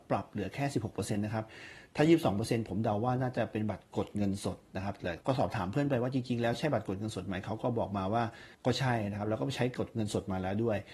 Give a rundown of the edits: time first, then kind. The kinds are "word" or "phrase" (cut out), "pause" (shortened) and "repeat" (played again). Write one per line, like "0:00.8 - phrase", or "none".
0:05.2 - pause
0:08.5 - pause